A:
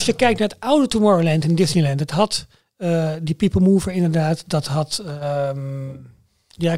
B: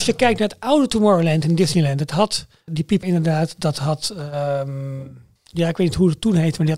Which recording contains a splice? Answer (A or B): B